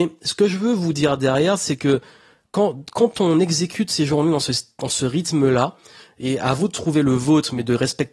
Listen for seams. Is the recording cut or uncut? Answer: uncut